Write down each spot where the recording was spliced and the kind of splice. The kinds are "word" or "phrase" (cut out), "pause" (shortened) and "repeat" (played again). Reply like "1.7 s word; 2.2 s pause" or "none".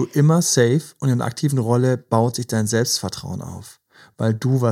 none